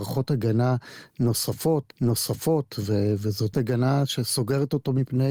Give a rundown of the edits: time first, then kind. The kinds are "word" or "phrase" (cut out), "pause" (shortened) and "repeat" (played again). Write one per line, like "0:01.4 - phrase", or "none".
0:01.9 - repeat
0:03.5 - word